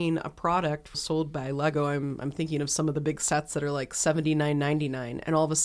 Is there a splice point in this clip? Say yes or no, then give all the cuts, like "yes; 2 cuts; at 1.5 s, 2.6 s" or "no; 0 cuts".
yes; 1 cut; at 0.9 s